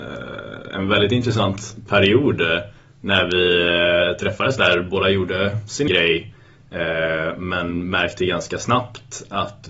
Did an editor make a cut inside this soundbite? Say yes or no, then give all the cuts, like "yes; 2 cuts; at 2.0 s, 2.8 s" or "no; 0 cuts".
yes; 1 cut; at 5.9 s